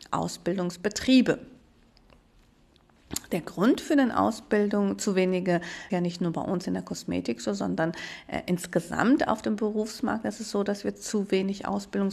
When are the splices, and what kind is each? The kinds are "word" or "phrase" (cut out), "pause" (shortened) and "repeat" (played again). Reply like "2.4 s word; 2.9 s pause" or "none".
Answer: 5.9 s phrase

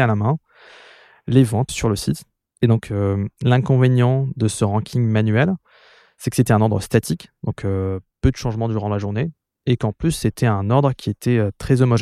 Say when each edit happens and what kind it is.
1.7 s word

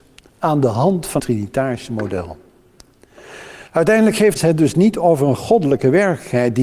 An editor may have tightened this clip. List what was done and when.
1.2 s word; 3.7 s pause; 4.4 s word

